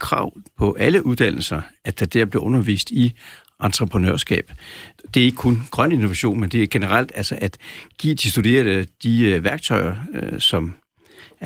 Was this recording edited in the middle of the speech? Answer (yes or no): no